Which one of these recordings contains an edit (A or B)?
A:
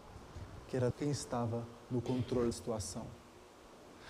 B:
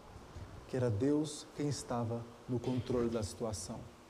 A